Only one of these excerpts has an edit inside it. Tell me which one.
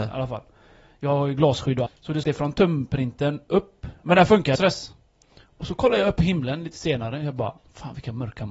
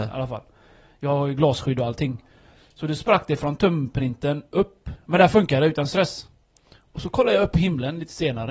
first; 3 cuts; at 1.9 s, 2.2 s, 4.5 s

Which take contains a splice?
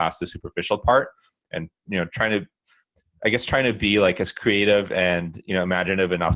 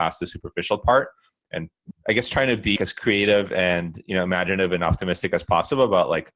second; 2 cuts; at 1.9 s, 2.8 s

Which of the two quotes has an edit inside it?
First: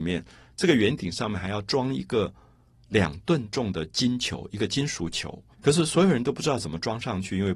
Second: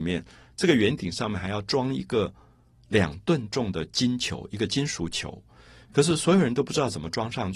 first; 1 cut; at 5.5 s

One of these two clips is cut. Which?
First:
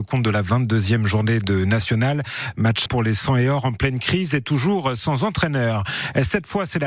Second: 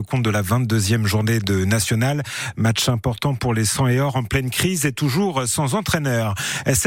first; 1 cut; at 2.9 s

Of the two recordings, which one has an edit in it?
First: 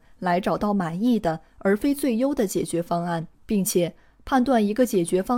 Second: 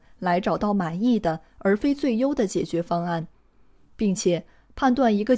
first; 1 cut; at 3.3 s

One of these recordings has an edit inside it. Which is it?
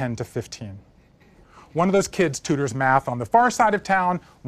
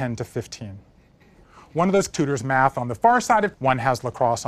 second; 2 cuts; at 2.1 s, 3.5 s

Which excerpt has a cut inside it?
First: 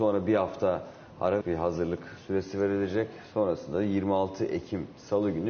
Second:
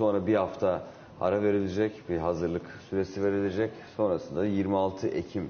first; 1 cut; at 1.4 s

